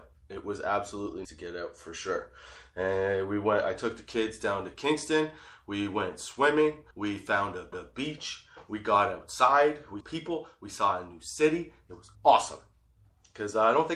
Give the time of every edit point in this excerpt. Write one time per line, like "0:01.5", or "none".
0:01.2
0:06.9
0:07.7
0:10.0
0:12.1